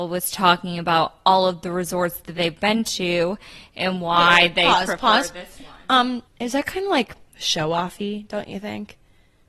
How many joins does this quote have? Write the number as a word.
two